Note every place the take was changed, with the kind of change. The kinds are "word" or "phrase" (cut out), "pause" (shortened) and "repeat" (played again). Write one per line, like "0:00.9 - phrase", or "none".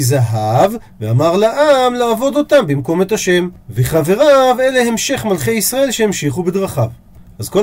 0:03.6 - pause

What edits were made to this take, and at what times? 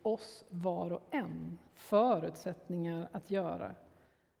0:01.7 - pause

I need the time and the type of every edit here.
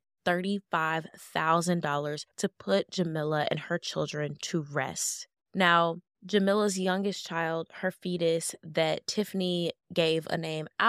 0:02.3 - pause

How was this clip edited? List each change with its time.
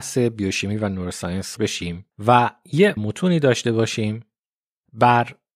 0:01.6 - word
0:02.1 - pause
0:03.0 - word

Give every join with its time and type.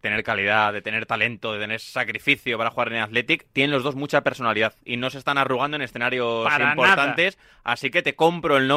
none

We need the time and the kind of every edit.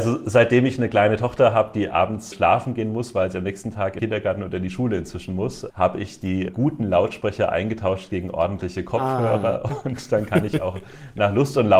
0:02.3 - word
0:04.0 - word
0:05.7 - word
0:06.5 - word

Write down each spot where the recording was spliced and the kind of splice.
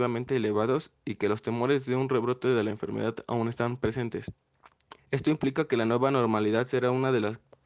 0:05.0 - pause

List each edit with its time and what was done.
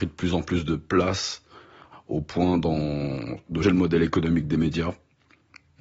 0:03.6 - word

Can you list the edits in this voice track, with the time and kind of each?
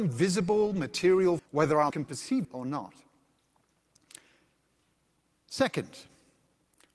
0:01.4 - word
0:01.9 - word
0:02.4 - word

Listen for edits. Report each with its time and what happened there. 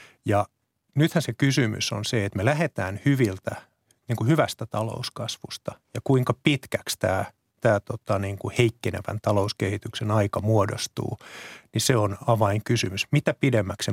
none

